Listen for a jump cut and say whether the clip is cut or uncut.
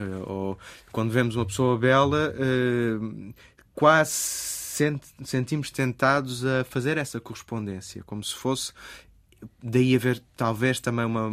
uncut